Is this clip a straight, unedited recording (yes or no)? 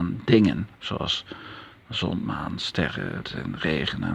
no